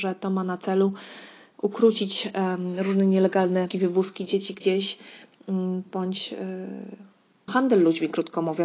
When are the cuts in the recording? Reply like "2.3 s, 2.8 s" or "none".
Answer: 3.7 s, 7.5 s